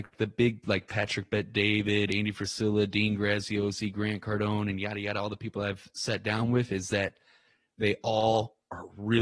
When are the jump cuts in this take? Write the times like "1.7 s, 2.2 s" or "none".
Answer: none

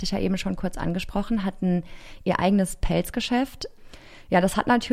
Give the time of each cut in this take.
none

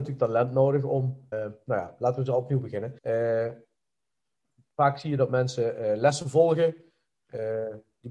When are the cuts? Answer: 1.3 s, 3.0 s

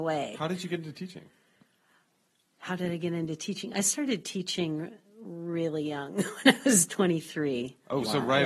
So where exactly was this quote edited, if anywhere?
none

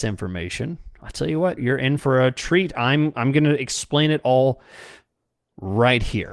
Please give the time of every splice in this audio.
1.6 s

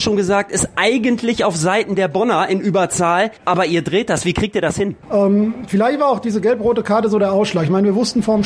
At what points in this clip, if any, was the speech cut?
3.4 s, 5.0 s

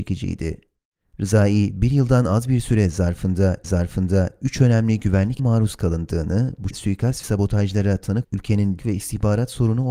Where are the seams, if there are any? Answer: 3.6 s, 5.4 s, 6.7 s, 7.2 s, 8.2 s, 8.8 s

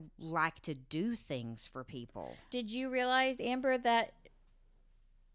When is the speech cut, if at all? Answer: 2.5 s

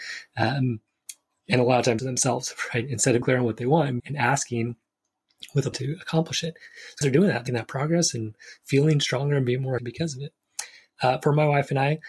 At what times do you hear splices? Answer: 2.0 s, 3.2 s, 4.0 s, 5.7 s, 7.0 s, 7.5 s, 9.8 s

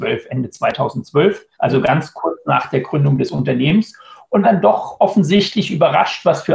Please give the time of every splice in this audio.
1.5 s, 4.4 s

